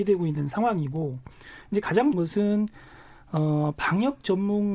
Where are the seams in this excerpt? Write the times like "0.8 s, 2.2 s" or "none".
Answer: 2.1 s